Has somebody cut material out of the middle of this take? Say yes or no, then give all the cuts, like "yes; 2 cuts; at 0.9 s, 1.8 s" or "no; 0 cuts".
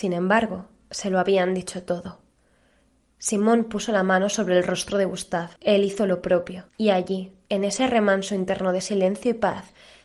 yes; 2 cuts; at 5.6 s, 6.7 s